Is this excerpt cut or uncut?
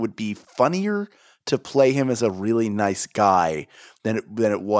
uncut